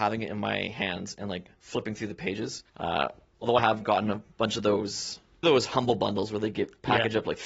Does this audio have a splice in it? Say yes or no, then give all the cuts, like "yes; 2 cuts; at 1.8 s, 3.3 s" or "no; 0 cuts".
yes; 4 cuts; at 1.6 s, 2.7 s, 3.6 s, 5.4 s